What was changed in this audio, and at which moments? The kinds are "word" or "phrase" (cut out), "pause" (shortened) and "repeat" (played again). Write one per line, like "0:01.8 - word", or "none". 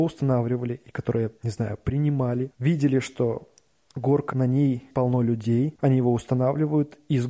0:01.4 - pause
0:04.3 - word